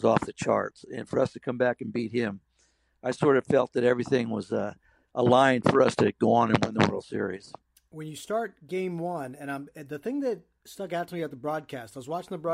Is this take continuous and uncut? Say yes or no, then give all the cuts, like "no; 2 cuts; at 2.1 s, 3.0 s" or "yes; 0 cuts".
yes; 0 cuts